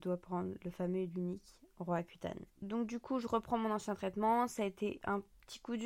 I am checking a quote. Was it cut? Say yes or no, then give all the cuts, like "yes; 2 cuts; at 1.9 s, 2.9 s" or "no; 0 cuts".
yes; 1 cut; at 2.6 s